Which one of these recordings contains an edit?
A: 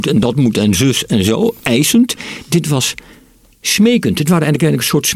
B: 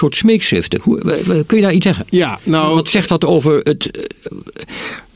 B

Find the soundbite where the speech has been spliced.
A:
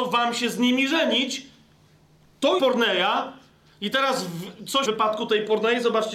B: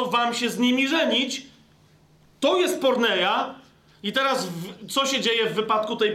A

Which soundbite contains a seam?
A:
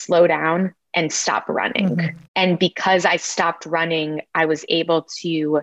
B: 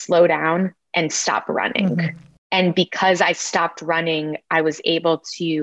A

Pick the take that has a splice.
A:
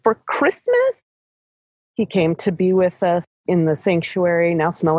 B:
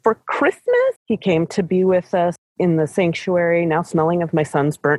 B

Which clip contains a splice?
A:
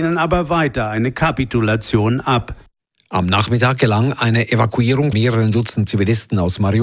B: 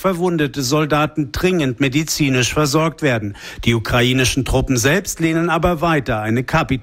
A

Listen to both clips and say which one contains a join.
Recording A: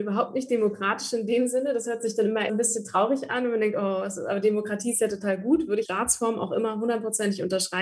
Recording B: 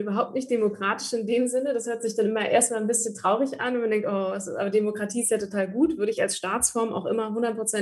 A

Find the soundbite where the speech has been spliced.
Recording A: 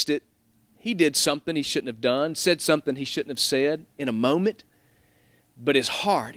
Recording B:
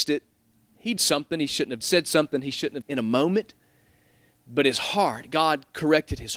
B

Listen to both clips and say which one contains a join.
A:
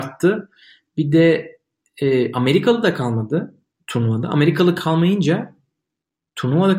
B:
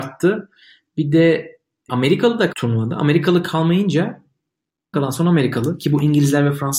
B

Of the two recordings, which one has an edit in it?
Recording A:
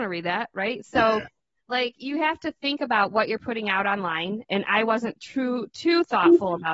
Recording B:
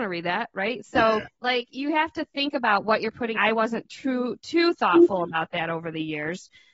B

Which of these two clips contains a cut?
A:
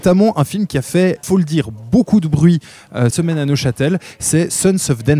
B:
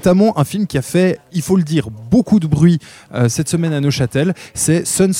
A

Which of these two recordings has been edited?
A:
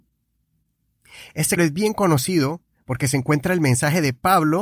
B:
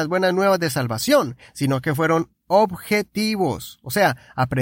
A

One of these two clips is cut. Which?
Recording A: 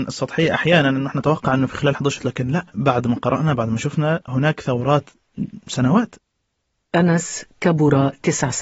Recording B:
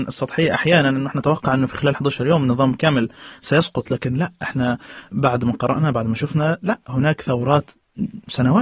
A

